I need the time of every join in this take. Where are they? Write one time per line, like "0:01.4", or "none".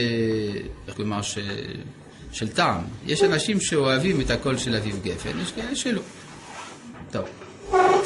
0:00.9